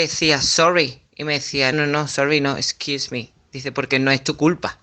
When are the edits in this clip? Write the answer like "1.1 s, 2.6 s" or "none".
1.7 s